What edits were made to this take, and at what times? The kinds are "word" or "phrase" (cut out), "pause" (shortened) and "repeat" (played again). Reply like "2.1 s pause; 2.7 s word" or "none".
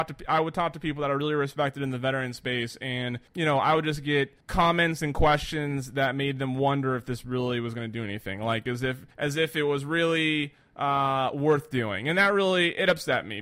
3.3 s pause; 4.4 s pause; 9.1 s pause